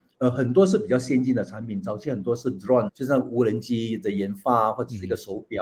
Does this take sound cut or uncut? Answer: cut